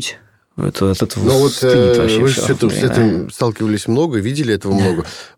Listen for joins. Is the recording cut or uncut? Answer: uncut